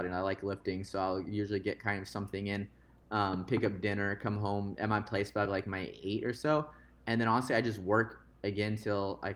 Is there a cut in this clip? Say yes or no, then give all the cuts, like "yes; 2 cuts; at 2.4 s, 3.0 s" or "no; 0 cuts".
no; 0 cuts